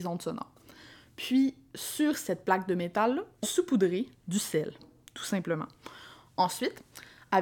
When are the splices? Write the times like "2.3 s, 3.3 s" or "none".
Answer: 3.4 s